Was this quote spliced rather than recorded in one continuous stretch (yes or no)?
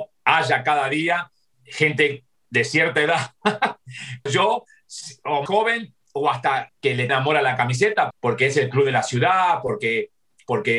yes